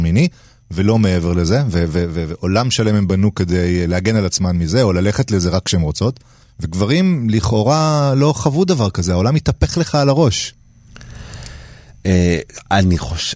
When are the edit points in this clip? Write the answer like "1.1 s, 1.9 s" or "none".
6.4 s